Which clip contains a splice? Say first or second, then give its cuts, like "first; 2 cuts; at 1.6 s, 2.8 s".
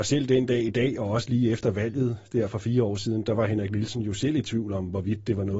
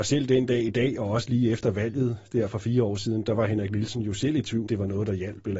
second; 1 cut; at 4.7 s